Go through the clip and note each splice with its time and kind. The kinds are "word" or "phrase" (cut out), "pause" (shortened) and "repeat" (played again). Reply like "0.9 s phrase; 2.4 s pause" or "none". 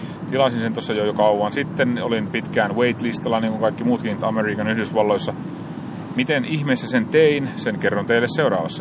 4.2 s phrase

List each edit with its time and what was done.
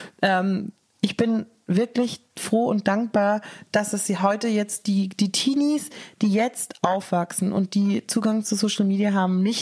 none

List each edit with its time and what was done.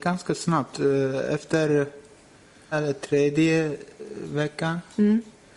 2.7 s word

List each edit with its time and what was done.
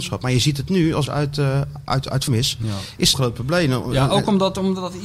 1.1 s word; 2.3 s word; 3.1 s phrase

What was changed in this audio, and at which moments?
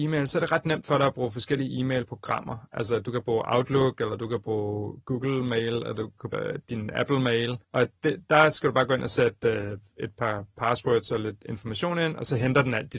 6.3 s word; 7.6 s pause

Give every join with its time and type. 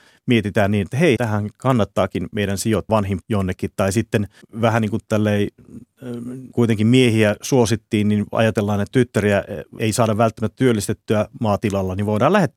1.2 s word; 2.9 s phrase; 3.2 s word; 4.4 s pause; 6.5 s phrase; 8.9 s word; 9.8 s word

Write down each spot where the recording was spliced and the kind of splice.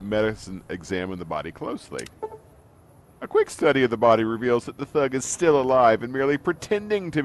none

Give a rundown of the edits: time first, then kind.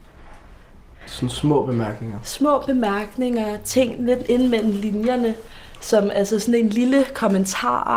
none

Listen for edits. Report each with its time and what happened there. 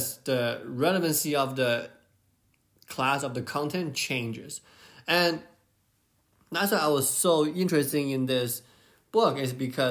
none

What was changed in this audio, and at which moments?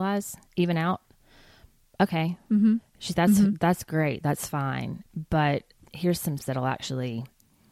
3.1 s word; 5.8 s word; 6.4 s word

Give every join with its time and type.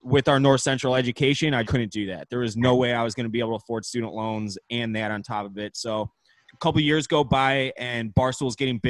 1.6 s word; 6.4 s word

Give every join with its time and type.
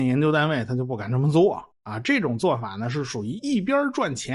1.7 s pause

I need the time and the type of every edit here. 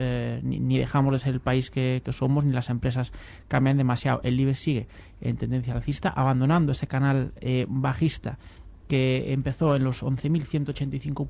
none

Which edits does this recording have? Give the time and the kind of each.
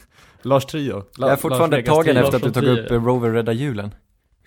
none

